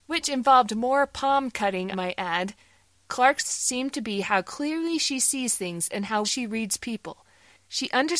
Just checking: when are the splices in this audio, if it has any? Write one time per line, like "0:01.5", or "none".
0:01.9
0:03.4
0:06.2